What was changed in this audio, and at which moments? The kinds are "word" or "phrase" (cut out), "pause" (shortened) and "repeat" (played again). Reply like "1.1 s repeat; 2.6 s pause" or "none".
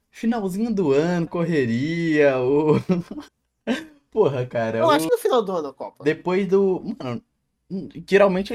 1.3 s phrase; 3.3 s pause; 5.1 s phrase